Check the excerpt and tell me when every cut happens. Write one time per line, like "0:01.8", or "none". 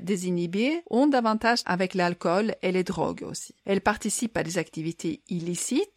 0:01.6